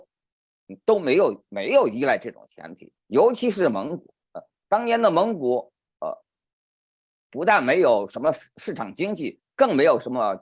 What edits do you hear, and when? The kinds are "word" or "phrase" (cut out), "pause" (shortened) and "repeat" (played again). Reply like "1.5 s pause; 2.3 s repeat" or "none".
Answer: 3.0 s pause; 4.2 s pause